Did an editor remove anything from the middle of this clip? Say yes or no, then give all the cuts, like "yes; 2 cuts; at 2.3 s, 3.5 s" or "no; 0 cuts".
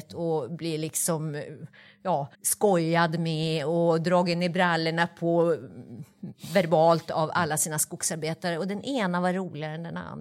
yes; 1 cut; at 2.3 s